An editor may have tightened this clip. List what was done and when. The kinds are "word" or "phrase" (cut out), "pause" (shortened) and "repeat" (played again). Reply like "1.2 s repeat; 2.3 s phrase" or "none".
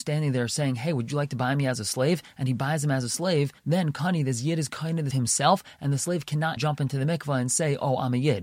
5.1 s word; 6.6 s word

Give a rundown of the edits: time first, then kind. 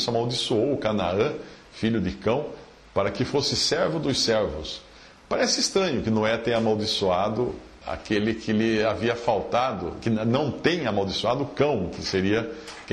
7.8 s word

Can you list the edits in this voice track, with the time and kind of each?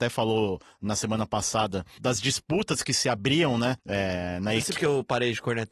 2.0 s word; 3.8 s pause; 4.8 s word

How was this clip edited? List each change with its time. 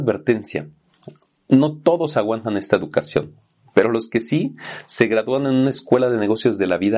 none

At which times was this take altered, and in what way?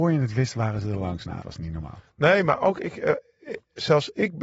1.4 s word

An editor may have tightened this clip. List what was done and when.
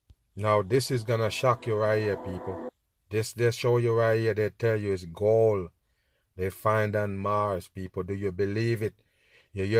none

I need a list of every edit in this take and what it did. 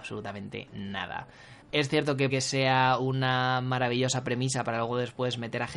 1.6 s pause; 2.3 s word

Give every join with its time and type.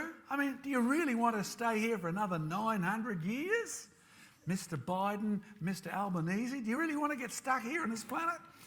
none

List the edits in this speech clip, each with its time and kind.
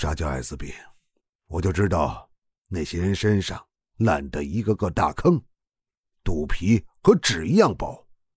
none

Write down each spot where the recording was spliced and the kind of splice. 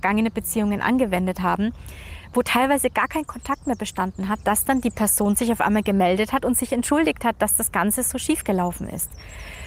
none

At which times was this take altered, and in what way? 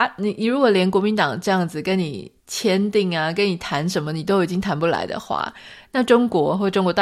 2.4 s pause

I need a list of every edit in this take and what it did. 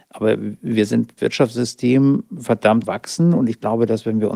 1.2 s word; 2.8 s word

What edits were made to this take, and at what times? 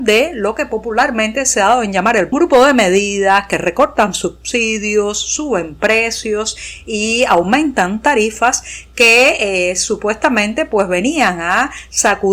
2.3 s phrase

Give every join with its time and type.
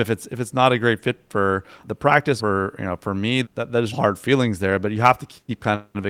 1.8 s word; 2.4 s word; 3.4 s word; 3.9 s word

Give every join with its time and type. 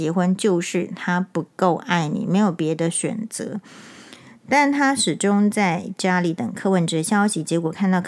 none

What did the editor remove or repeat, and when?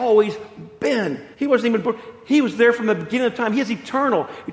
1.3 s pause

